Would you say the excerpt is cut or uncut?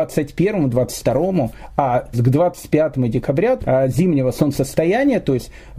cut